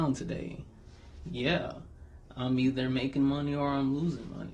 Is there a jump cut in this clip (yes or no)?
no